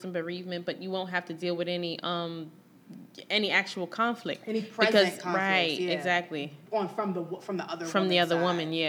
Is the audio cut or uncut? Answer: uncut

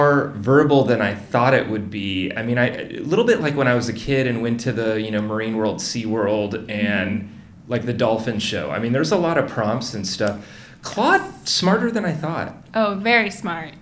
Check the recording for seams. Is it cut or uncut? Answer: uncut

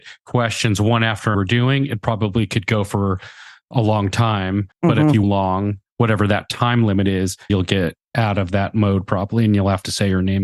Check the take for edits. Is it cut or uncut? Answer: cut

